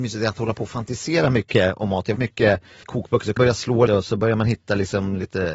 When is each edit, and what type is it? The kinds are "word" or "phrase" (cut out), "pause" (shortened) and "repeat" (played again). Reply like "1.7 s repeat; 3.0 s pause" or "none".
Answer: 2.2 s word; 2.8 s word; 3.4 s word; 3.9 s word